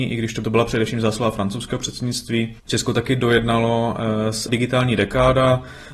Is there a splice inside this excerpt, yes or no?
yes